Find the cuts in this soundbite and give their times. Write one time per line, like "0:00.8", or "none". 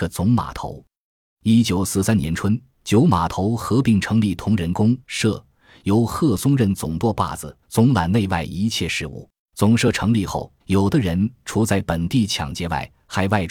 0:02.7
0:05.0
0:07.6
0:09.4
0:10.6